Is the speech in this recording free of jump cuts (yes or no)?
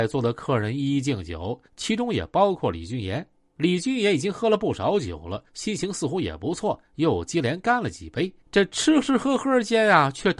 no